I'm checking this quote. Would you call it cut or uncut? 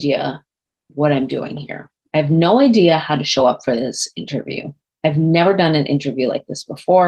uncut